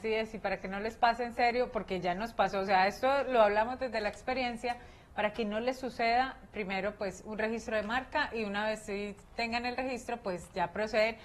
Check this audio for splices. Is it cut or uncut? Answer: uncut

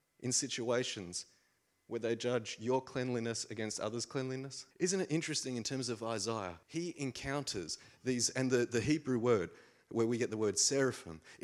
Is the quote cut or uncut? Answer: cut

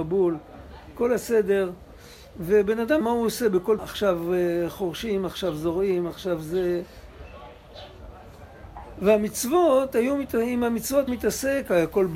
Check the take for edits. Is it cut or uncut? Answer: cut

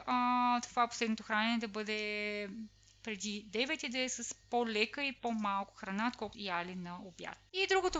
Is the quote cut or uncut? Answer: cut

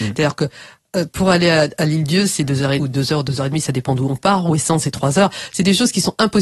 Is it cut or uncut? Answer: cut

